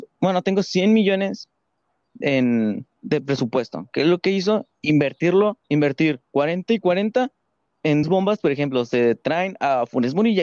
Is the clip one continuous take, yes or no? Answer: no